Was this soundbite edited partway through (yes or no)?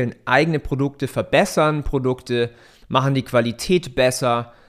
no